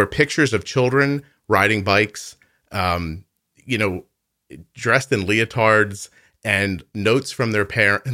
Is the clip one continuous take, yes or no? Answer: yes